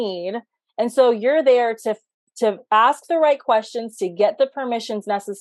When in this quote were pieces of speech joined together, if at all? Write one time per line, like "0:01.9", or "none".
none